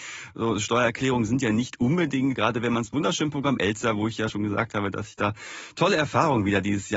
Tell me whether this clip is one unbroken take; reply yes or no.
no